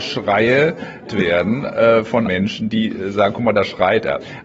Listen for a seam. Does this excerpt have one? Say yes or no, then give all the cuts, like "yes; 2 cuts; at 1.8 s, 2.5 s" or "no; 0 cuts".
yes; 2 cuts; at 1.1 s, 2.3 s